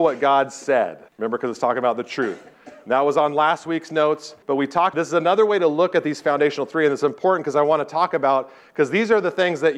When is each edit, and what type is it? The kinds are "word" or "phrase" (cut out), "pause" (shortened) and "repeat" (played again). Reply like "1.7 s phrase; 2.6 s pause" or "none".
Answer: 1.1 s pause; 4.4 s pause; 4.9 s word